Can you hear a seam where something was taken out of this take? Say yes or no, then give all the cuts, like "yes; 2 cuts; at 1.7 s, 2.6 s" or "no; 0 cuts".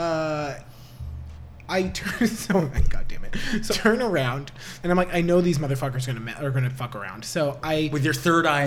yes; 2 cuts; at 3.7 s, 4.8 s